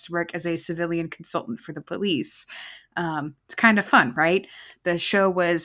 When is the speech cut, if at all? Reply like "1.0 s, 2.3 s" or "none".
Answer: 3.4 s